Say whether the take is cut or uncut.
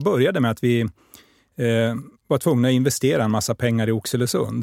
uncut